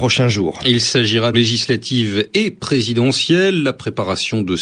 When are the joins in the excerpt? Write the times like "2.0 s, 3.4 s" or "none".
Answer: 1.3 s